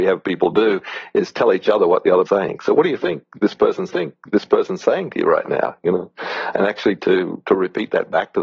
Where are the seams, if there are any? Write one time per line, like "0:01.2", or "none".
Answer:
0:02.3
0:03.9
0:06.5

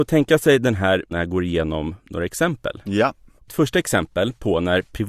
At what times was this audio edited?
0:01.1
0:03.5

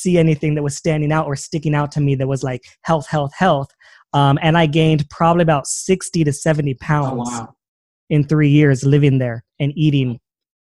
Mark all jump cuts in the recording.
none

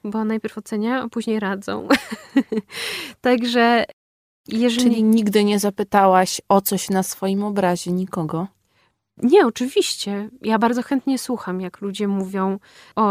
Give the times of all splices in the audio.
none

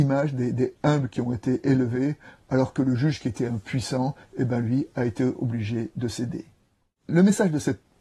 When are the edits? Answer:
none

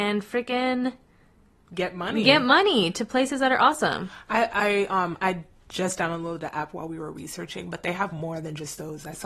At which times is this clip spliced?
none

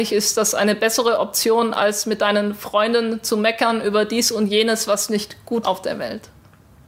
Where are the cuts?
0:05.6

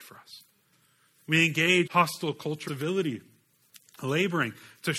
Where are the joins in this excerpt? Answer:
0:01.9
0:02.7

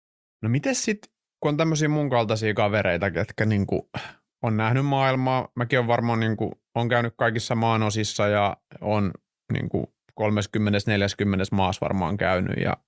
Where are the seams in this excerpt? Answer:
none

